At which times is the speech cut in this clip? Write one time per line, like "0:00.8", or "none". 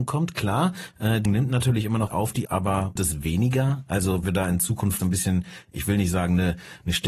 0:01.3
0:02.1
0:02.5
0:03.0
0:04.2
0:05.0